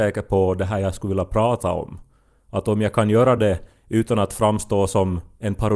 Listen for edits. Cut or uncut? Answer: uncut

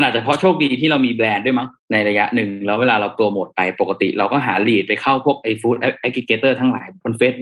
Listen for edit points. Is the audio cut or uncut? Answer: cut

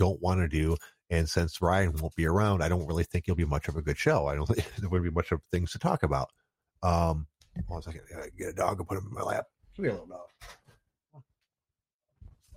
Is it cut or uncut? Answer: uncut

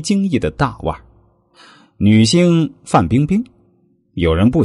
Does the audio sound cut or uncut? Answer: uncut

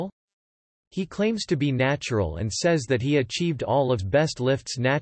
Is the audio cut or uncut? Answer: cut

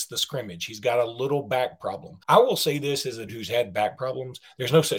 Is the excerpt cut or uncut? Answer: cut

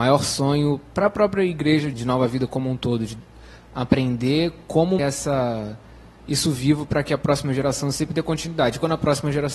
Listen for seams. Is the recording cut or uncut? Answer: cut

